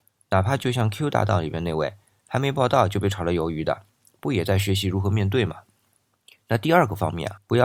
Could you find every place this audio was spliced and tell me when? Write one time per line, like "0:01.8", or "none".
none